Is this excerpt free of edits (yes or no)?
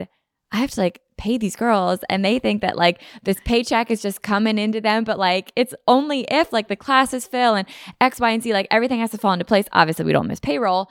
yes